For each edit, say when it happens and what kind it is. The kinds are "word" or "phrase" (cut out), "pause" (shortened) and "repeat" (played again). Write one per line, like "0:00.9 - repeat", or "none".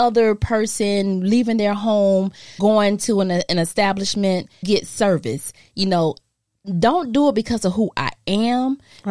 0:02.6 - word
0:04.6 - word